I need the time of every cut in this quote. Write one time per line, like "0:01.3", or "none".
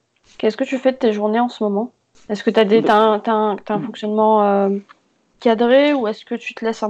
none